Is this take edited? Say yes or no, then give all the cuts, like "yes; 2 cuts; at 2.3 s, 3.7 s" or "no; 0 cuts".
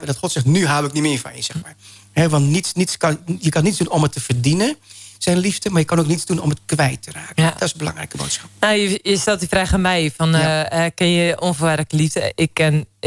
no; 0 cuts